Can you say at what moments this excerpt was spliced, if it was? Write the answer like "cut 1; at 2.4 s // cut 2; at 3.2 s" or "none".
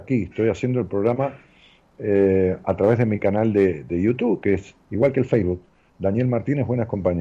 none